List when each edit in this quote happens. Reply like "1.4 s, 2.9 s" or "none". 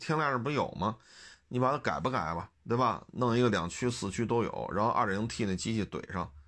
2.5 s